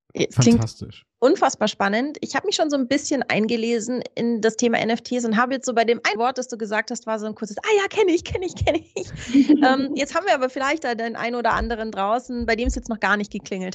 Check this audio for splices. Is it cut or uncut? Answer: cut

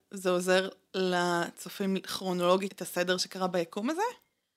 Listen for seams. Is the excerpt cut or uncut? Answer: cut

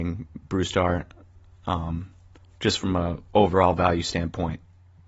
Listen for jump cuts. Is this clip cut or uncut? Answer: uncut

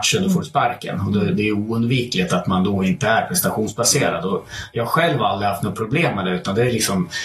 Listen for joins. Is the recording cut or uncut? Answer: uncut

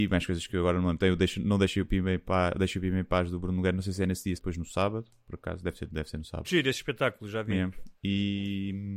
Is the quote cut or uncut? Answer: cut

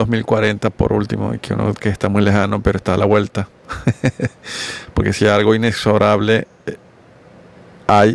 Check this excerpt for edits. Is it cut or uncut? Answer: cut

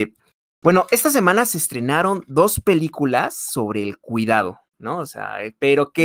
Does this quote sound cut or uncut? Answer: cut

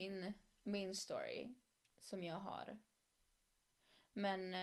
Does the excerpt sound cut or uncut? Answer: uncut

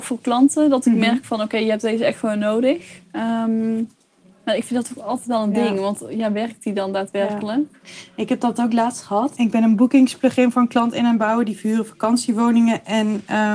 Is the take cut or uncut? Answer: uncut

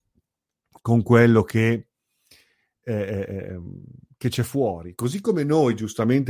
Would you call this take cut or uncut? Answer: uncut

